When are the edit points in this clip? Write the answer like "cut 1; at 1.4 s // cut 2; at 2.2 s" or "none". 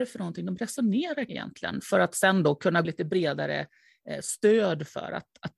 cut 1; at 1.3 s // cut 2; at 2.8 s